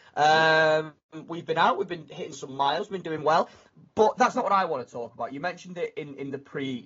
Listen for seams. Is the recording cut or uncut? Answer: uncut